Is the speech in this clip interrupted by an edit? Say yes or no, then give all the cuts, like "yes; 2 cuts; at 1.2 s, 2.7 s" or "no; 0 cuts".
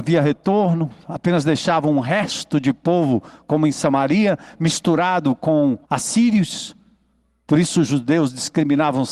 yes; 1 cut; at 5.8 s